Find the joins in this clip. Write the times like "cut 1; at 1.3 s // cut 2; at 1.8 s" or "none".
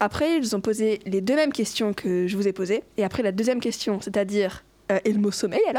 cut 1; at 2.9 s